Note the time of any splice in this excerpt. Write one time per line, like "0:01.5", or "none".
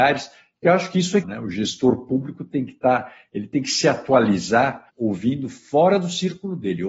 0:01.2
0:04.9

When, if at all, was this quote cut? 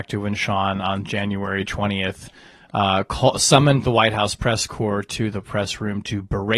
none

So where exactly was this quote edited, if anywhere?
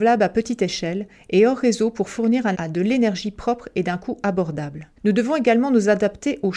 0:02.5
0:05.0

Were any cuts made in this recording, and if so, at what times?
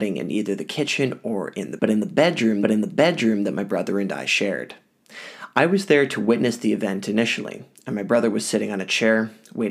0:01.8
0:02.6

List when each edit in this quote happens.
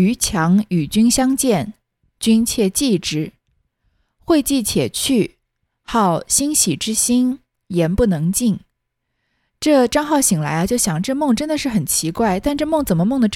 none

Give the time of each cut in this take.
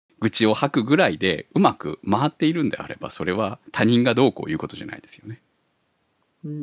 0:03.7

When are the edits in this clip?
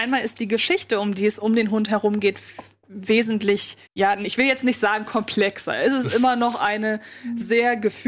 0:03.9

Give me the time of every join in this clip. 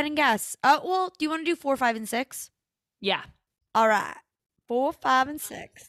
none

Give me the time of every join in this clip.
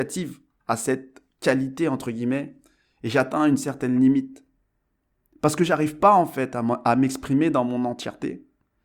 none

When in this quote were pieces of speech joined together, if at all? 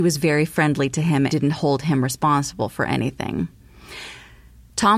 0:01.3

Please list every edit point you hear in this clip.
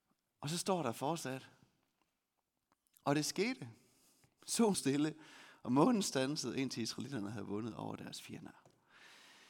0:04.7

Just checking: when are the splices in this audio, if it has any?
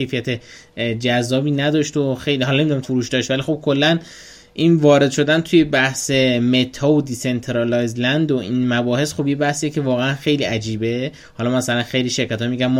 0:02.8

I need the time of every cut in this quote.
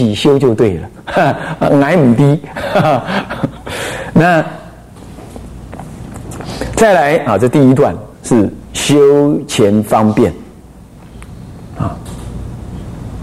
0:08.1

